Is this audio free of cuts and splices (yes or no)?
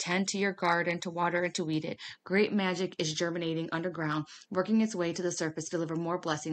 yes